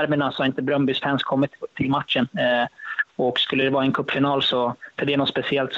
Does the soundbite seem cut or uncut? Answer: uncut